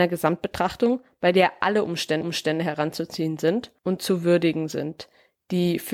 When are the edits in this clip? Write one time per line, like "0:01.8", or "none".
0:02.2
0:03.8